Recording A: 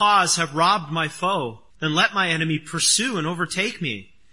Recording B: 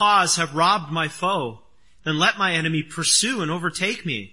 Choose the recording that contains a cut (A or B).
A